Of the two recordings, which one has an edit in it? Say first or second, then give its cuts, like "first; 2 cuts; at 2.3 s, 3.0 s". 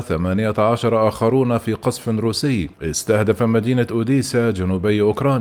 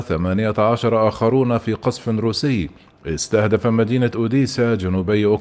first; 1 cut; at 2.7 s